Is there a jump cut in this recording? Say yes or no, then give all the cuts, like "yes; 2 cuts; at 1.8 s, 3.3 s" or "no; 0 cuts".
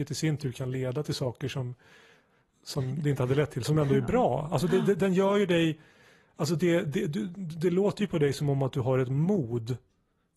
no; 0 cuts